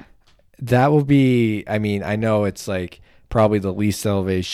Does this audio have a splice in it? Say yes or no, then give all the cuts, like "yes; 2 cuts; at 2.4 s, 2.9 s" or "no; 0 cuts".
no; 0 cuts